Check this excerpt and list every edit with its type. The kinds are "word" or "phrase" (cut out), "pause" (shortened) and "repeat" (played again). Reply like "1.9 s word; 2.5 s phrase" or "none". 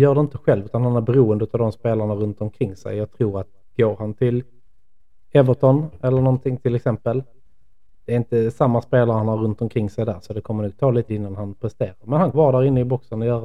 11.1 s word; 12.3 s word